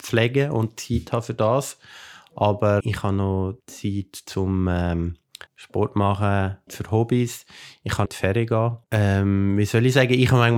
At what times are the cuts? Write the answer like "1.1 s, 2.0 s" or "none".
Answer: 2.8 s, 3.6 s, 5.5 s, 6.7 s, 8.1 s, 8.8 s